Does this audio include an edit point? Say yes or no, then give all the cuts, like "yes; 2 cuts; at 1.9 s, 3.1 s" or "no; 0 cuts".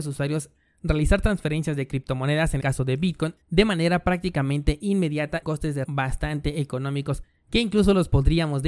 yes; 4 cuts; at 2.6 s, 3.4 s, 5.4 s, 5.8 s